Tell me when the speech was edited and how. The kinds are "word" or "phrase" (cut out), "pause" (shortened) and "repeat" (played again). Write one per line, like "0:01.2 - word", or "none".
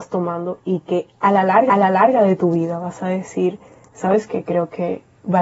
0:01.7 - repeat